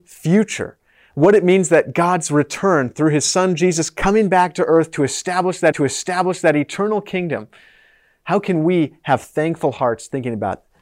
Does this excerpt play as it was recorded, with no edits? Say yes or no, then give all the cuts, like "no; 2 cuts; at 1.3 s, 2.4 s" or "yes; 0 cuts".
no; 1 cut; at 5.7 s